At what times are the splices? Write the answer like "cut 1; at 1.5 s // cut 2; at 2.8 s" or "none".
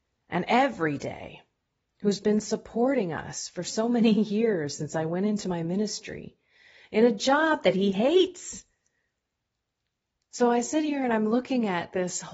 none